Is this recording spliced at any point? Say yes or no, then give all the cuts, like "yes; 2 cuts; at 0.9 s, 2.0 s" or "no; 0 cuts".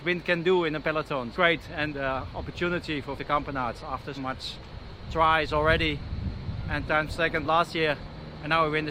yes; 5 cuts; at 1.3 s, 1.9 s, 3.2 s, 4.2 s, 6.8 s